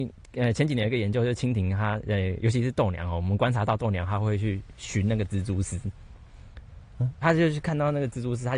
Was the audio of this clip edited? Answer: yes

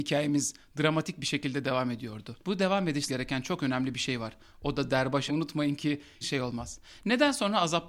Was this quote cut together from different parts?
yes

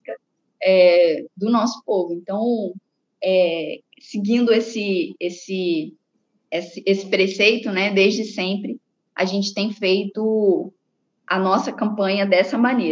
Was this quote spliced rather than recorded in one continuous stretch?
no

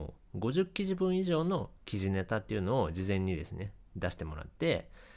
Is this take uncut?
yes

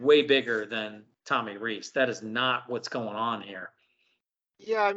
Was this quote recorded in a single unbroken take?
yes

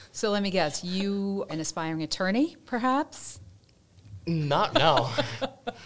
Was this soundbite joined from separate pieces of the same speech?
yes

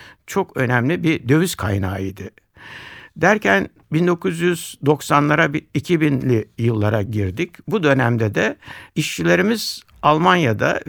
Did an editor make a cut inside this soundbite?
no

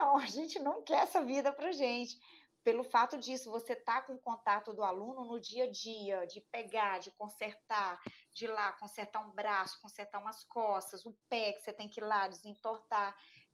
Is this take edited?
no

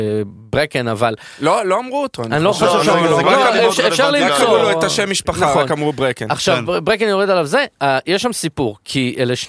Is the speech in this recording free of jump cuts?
no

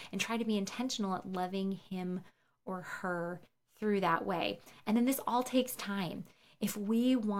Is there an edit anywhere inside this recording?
no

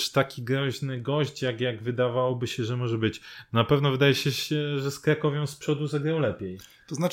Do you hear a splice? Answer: no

